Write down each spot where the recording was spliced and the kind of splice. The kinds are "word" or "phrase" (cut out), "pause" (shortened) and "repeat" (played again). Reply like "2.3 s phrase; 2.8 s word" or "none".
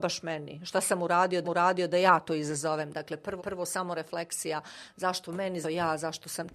1.4 s repeat; 3.4 s repeat; 5.6 s word